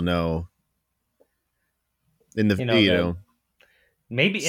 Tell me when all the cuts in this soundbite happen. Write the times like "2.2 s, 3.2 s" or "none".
none